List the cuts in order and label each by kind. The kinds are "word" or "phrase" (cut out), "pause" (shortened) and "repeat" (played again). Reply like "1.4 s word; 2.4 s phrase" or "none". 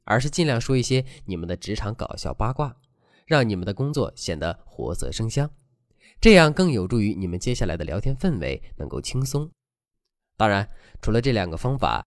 none